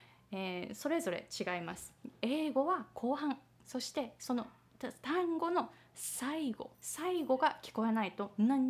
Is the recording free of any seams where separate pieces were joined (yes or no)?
no